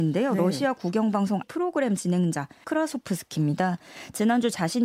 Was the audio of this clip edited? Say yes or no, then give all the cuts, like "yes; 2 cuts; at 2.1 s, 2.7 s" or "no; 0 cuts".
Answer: yes; 2 cuts; at 1.4 s, 2.6 s